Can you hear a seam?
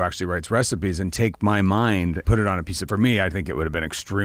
yes; 2 cuts; at 2.2 s, 2.9 s

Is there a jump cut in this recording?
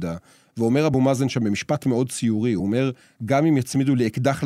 no; 0 cuts

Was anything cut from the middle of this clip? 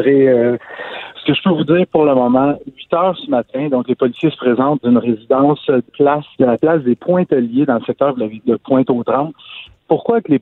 yes; 4 cuts; at 4.8 s, 5.9 s, 6.3 s, 8.4 s

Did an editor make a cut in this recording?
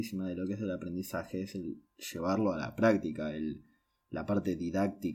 no; 0 cuts

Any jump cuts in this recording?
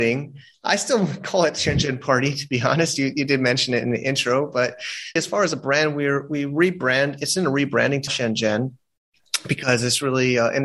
yes; 2 cuts; at 5.2 s, 8.1 s

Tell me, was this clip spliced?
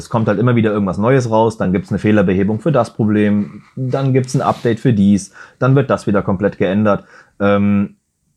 no; 0 cuts

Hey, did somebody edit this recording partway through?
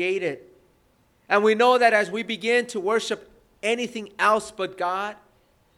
no; 0 cuts

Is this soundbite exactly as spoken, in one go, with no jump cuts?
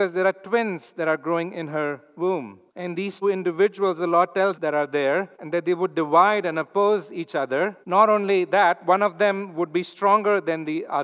no; 5 cuts; at 2.7 s, 3.2 s, 4.5 s, 5.3 s, 7.8 s

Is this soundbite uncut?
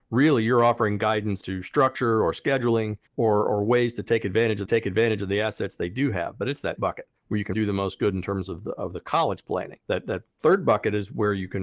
no; 8 cuts; at 1.4 s, 3.1 s, 4.7 s, 6.8 s, 7.2 s, 7.5 s, 9.8 s, 10.3 s

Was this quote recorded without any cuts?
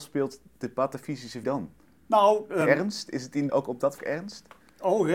no; 4 cuts; at 1.4 s, 2.6 s, 3.5 s, 4.0 s

